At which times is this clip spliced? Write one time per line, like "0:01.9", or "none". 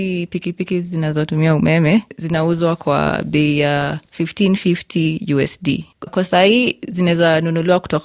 0:06.1

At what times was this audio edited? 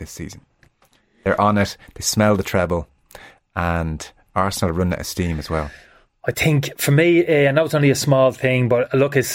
none

